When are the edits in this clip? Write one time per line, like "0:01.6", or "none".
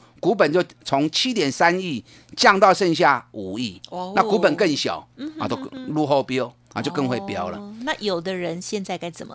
none